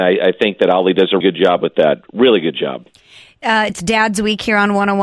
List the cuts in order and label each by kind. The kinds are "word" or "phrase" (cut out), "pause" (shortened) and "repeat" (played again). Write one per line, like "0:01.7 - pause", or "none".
0:01.2 - word
0:03.7 - word